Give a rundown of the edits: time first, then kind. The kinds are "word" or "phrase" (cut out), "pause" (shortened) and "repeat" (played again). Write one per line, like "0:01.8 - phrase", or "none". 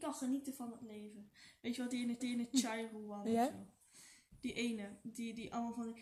0:02.2 - repeat